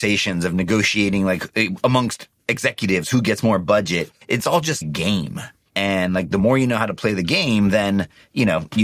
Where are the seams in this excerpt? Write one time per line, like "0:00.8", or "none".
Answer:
0:04.2
0:04.8